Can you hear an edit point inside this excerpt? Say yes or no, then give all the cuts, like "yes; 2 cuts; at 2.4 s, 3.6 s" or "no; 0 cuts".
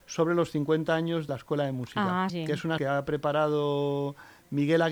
yes; 3 cuts; at 1.3 s, 2.3 s, 2.8 s